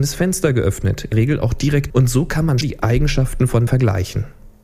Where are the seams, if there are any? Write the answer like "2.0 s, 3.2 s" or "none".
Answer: 1.1 s, 1.9 s, 2.6 s, 3.7 s

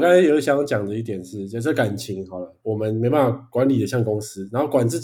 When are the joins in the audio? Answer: 2.6 s

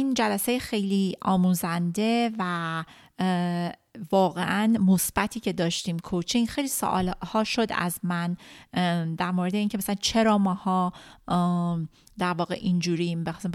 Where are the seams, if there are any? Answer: none

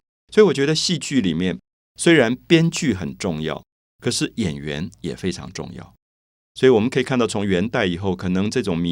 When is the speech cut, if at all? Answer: none

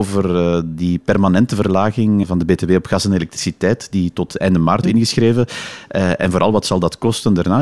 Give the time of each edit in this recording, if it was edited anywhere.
2.2 s, 4.8 s

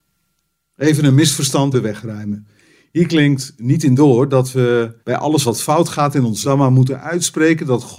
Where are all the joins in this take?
1.7 s, 5.0 s, 6.4 s

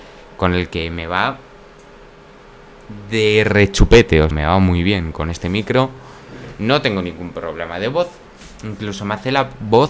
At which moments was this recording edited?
4.3 s

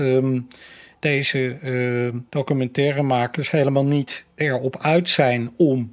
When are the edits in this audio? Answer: 2.3 s

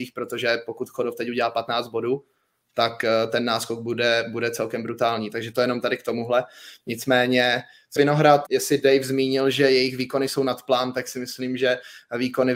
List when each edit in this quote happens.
8.0 s, 8.5 s

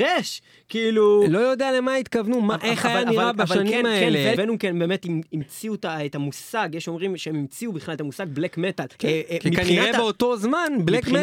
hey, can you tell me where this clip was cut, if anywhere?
4.3 s, 8.9 s

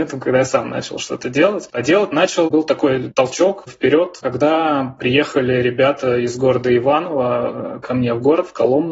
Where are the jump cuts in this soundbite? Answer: none

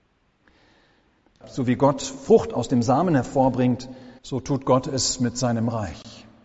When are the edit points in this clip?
4.2 s

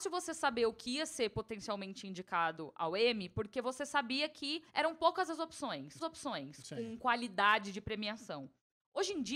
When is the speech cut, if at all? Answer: 4.7 s, 6.0 s

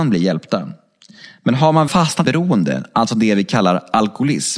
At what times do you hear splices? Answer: 1.9 s, 2.2 s

